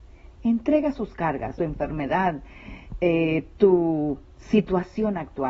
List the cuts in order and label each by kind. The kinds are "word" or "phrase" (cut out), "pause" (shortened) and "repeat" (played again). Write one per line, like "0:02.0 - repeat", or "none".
0:01.6 - phrase